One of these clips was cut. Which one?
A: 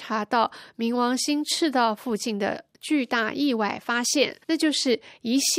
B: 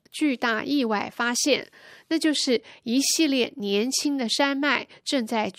A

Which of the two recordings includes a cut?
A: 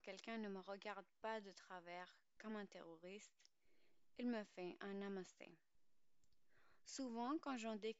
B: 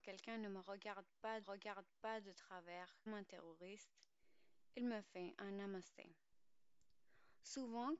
B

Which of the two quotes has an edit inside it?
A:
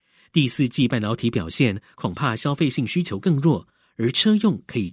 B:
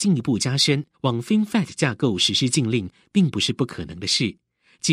B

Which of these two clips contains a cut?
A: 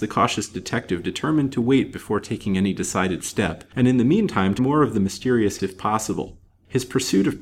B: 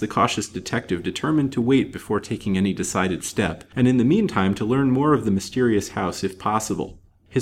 A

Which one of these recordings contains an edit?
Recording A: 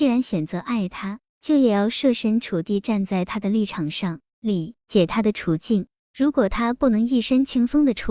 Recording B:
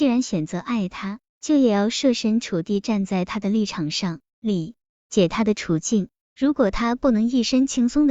A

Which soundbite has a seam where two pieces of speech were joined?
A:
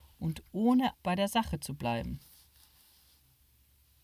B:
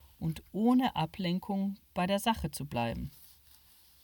A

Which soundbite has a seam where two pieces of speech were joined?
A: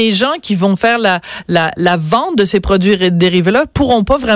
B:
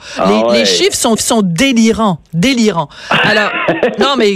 B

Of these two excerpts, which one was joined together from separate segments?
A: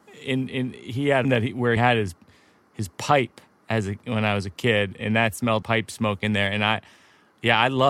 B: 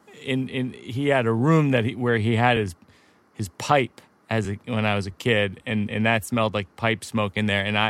A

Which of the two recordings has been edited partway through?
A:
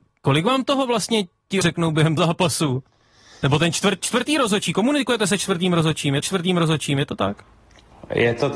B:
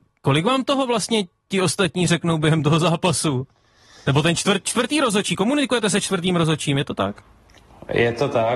A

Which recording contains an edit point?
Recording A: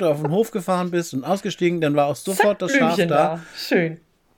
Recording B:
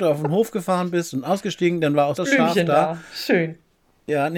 B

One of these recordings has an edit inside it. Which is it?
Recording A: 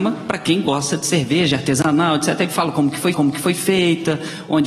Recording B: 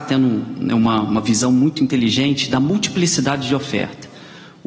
A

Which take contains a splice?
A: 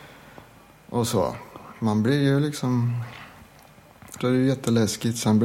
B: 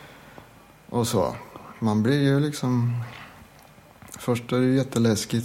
A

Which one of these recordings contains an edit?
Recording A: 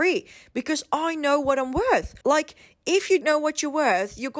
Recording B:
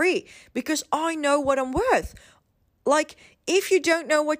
A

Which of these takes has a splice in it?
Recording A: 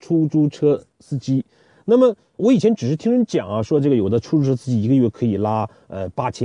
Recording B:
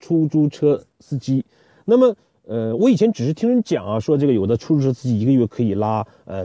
A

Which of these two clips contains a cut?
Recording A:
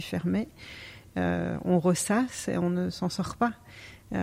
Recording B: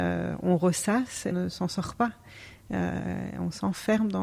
B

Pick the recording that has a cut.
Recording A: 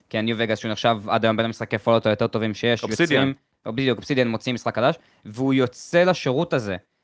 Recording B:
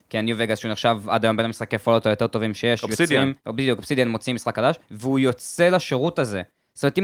B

